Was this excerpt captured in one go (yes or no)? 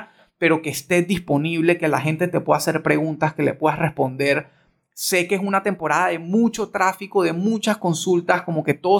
yes